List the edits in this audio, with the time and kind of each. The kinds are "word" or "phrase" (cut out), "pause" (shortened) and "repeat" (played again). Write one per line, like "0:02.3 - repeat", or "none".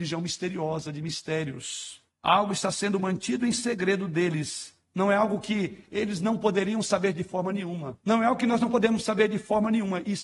0:02.1 - pause
0:04.8 - pause
0:08.0 - pause